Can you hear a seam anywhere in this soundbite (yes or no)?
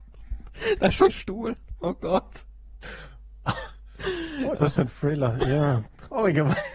yes